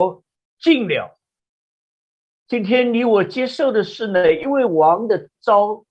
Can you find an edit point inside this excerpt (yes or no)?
yes